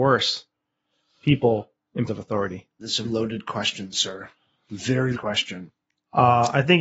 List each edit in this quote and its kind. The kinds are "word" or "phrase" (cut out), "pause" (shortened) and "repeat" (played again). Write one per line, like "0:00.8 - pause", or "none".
0:02.1 - word
0:03.0 - word
0:05.1 - word